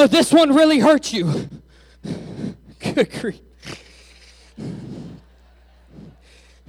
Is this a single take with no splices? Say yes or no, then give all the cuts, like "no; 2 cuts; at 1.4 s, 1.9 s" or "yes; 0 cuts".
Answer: yes; 0 cuts